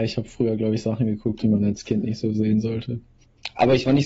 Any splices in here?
no; 0 cuts

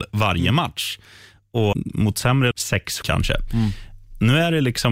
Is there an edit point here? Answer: yes; 3 cuts; at 1.7 s, 2.5 s, 3.0 s

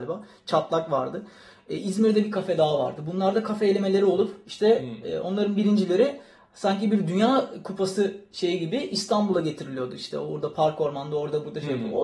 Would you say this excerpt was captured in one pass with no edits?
yes; 0 cuts

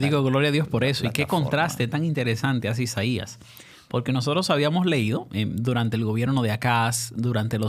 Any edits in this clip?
no; 0 cuts

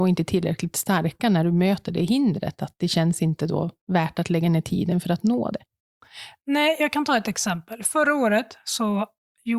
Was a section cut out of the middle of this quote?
yes; 1 cut; at 3.8 s

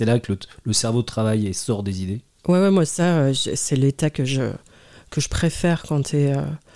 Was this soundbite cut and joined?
no; 0 cuts

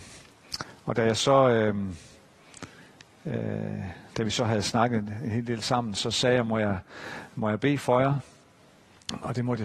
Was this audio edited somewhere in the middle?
no; 0 cuts

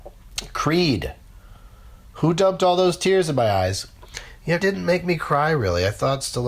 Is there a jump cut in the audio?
yes; 1 cut; at 4.6 s

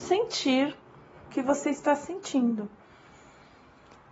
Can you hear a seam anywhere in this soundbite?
yes; 1 cut; at 1.3 s

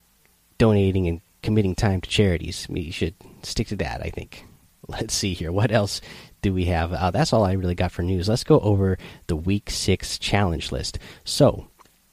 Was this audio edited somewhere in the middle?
no; 0 cuts

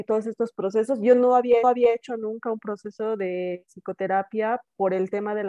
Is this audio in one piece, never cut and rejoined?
no; 1 cut; at 1.6 s

